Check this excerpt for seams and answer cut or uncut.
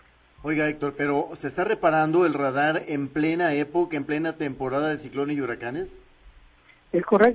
uncut